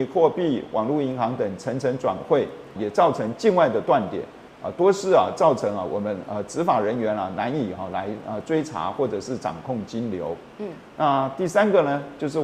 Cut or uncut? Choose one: cut